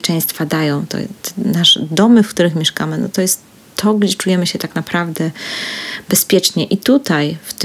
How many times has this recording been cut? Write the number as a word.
zero